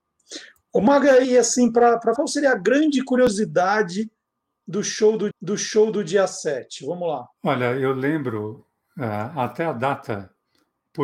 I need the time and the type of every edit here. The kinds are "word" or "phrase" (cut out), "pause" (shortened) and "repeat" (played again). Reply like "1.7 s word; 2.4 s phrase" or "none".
1.2 s word; 2.2 s word; 5.3 s repeat; 7.3 s pause